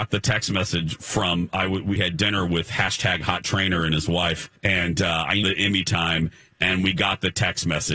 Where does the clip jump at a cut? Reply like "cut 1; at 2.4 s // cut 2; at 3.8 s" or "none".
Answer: cut 1; at 2.0 s // cut 2; at 4.6 s // cut 3; at 5.4 s